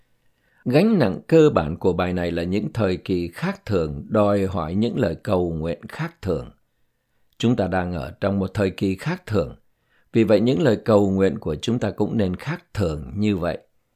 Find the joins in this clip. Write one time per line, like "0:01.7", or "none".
none